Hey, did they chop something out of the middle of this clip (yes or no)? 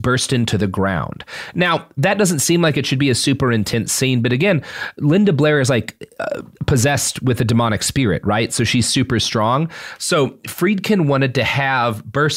no